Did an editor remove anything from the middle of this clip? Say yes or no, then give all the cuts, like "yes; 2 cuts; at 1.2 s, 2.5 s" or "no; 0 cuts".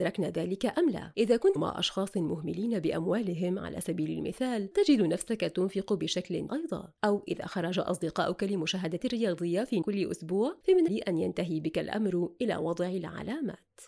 yes; 6 cuts; at 1.6 s, 4.7 s, 6.5 s, 9.0 s, 9.8 s, 10.9 s